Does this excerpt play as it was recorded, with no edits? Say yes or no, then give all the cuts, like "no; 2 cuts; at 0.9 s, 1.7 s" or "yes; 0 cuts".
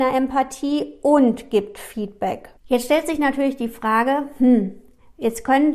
no; 1 cut; at 2.6 s